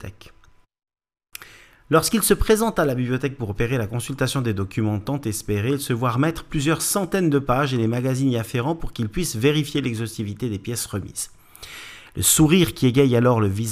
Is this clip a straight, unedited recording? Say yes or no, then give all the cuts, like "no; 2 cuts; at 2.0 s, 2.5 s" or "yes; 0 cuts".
yes; 0 cuts